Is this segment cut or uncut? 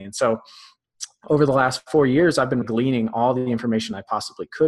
cut